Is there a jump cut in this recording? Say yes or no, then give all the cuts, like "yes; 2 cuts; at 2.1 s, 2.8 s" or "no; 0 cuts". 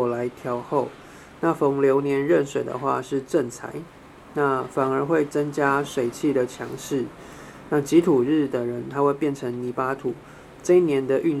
no; 0 cuts